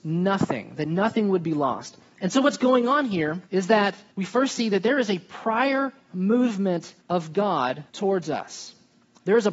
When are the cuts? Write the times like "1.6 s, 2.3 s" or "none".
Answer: 3.5 s, 4.1 s, 7.0 s, 7.9 s